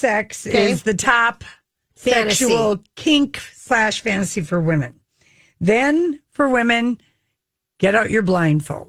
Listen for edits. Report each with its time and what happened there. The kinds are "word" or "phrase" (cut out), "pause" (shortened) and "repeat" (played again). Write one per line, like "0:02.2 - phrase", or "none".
none